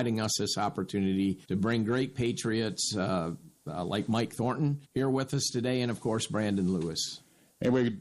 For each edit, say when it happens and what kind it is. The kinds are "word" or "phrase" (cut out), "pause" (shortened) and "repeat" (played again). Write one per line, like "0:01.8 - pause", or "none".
0:01.4 - pause
0:04.8 - pause